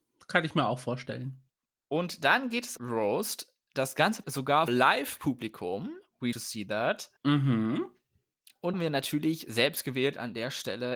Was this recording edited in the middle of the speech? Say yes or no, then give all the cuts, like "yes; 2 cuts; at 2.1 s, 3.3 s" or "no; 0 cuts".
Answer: yes; 7 cuts; at 1.6 s, 2.8 s, 4.2 s, 4.7 s, 6.3 s, 7.2 s, 8.7 s